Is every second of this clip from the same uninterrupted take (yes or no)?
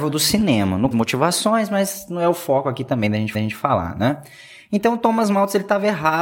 no